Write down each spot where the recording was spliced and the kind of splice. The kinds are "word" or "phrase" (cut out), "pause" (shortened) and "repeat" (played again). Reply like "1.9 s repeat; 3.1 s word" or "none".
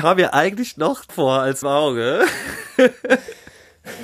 1.1 s word; 1.6 s phrase